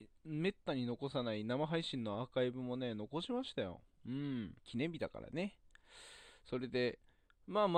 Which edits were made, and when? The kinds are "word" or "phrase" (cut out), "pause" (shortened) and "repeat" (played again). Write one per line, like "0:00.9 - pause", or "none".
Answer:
0:04.6 - pause